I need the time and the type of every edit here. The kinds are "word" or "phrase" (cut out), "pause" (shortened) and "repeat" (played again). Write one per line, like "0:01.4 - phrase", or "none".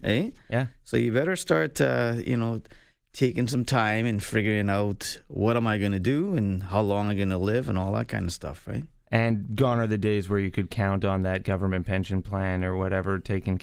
none